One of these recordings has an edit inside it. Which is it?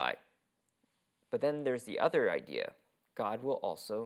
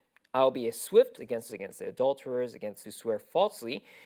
second; 3 cuts; at 1.2 s, 1.5 s, 2.8 s

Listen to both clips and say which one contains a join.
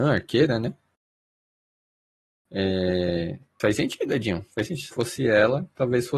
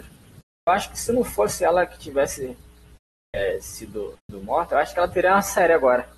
first; 2 cuts; at 3.6 s, 4.9 s

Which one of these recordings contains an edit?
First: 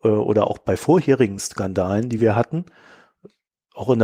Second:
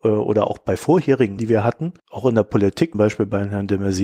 second; 3 cuts; at 1.4 s, 2.0 s, 2.9 s

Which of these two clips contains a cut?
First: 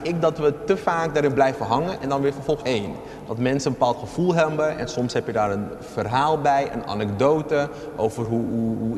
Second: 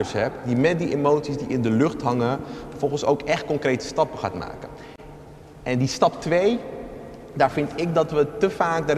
first; 1 cut; at 2.6 s

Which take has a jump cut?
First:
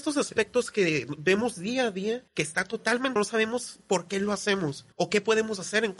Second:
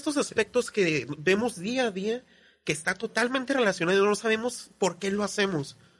first; 3 cuts; at 2.3 s, 3.2 s, 4.9 s

